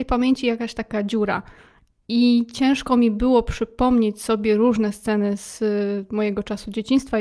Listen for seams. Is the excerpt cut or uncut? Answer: uncut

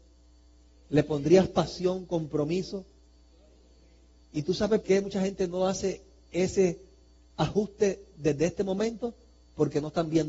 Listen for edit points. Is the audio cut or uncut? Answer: cut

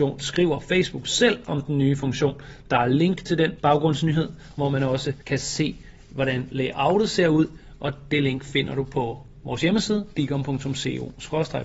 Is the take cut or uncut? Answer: cut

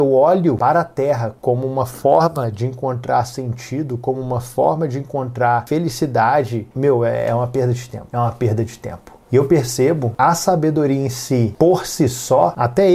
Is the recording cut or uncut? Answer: uncut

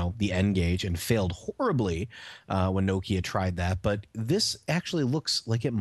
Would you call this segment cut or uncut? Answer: uncut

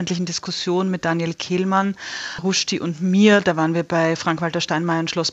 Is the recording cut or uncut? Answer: uncut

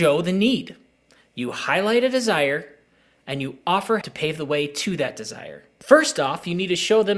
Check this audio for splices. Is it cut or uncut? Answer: cut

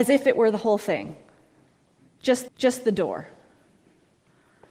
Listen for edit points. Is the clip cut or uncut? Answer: cut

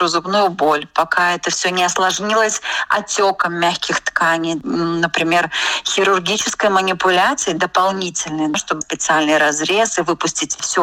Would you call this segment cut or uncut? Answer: cut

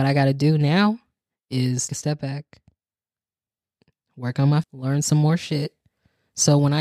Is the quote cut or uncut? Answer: cut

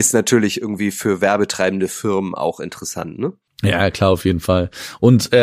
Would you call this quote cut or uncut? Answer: uncut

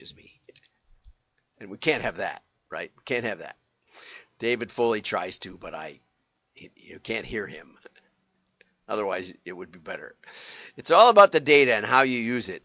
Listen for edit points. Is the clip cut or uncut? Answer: uncut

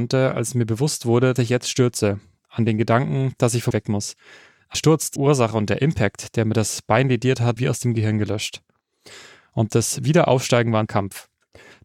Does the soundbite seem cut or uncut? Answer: cut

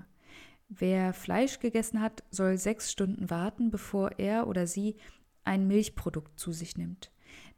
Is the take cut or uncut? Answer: uncut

